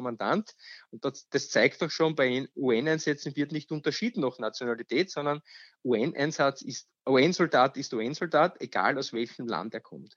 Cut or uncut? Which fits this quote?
uncut